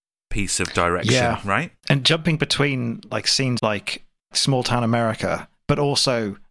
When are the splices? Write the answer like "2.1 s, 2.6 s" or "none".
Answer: 1.8 s, 3.6 s, 4.3 s